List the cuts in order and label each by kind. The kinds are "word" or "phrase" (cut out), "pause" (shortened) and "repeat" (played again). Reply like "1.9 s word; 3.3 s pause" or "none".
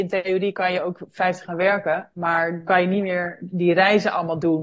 1.4 s word; 2.7 s word